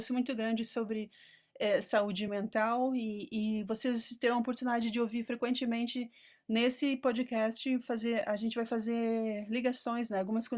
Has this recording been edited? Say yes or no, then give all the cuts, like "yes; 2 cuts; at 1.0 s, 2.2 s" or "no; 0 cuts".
no; 0 cuts